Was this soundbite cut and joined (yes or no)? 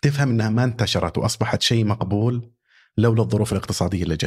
no